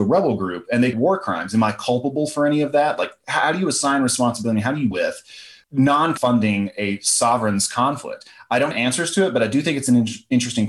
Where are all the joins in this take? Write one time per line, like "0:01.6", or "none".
0:00.9
0:04.9
0:06.2
0:08.7